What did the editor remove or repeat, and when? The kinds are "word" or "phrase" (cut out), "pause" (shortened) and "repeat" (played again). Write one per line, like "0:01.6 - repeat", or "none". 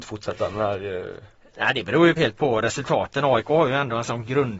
0:02.2 - word